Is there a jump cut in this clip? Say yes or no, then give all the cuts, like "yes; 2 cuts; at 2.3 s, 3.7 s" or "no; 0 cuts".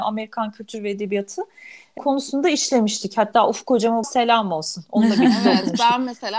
yes; 2 cuts; at 2.0 s, 4.0 s